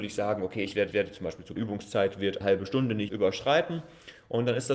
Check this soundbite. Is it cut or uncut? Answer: cut